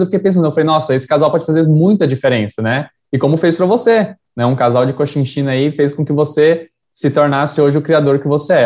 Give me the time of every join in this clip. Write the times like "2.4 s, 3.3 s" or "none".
none